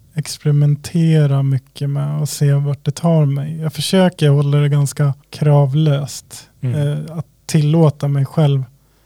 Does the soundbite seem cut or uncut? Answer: cut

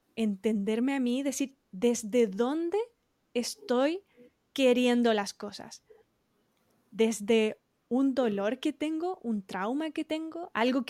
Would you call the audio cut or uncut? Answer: uncut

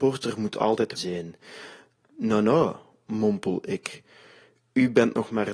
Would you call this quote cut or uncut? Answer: cut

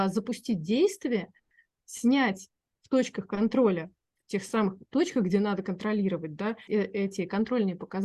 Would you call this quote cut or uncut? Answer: cut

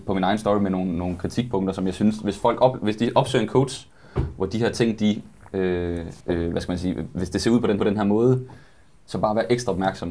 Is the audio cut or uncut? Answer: cut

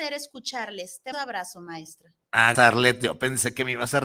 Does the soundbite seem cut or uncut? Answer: cut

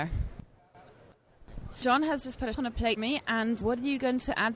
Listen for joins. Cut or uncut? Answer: cut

